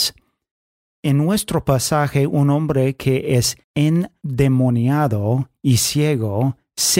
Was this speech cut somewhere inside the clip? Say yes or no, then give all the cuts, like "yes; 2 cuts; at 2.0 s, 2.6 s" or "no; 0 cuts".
yes; 1 cut; at 3.6 s